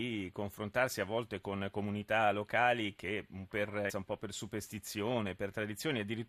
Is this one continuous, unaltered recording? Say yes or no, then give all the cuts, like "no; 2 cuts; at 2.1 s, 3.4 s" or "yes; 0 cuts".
no; 2 cuts; at 3.5 s, 3.9 s